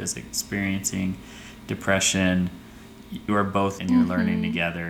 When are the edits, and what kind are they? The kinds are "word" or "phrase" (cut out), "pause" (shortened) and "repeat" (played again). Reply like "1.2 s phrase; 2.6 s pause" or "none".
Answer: 3.3 s word; 3.8 s word